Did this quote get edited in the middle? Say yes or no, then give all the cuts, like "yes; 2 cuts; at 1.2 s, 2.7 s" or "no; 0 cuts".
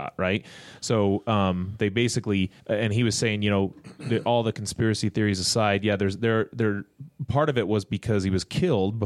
yes; 1 cut; at 2.6 s